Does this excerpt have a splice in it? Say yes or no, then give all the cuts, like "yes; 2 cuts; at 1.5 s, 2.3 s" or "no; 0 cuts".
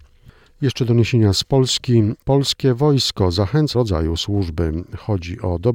yes; 1 cut; at 3.7 s